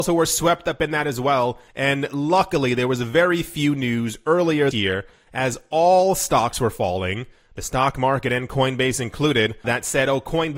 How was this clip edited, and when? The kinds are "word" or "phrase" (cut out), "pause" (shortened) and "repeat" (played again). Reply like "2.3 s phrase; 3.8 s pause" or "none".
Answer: 1.7 s pause; 4.7 s word; 9.6 s word

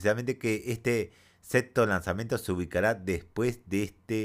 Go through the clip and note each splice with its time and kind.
none

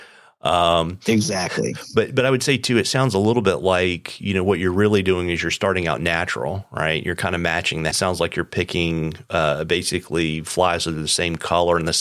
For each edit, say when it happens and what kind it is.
7.9 s phrase

